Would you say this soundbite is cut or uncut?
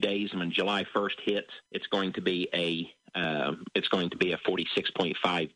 cut